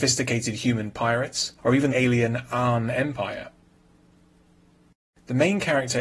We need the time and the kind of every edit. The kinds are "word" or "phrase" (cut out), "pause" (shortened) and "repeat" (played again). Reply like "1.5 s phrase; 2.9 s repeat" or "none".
1.6 s pause; 1.9 s phrase